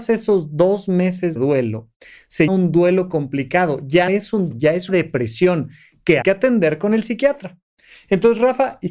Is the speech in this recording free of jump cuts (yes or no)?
no